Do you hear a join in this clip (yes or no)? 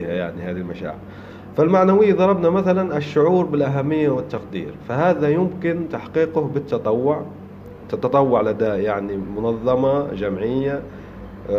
no